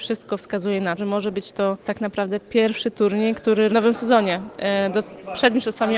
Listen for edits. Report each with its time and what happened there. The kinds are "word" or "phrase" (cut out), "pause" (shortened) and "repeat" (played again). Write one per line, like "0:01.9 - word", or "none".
0:01.0 - word
0:01.8 - pause
0:03.7 - phrase